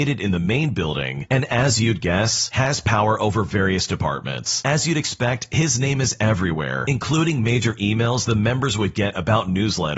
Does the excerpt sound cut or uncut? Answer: uncut